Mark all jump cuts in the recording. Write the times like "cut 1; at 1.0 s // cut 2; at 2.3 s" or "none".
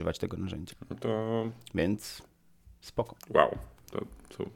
none